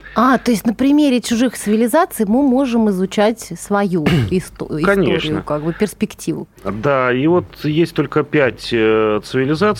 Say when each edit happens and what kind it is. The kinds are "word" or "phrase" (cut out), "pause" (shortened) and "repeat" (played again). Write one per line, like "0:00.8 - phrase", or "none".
none